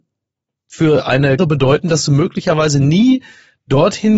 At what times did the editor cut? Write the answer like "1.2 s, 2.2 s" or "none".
1.4 s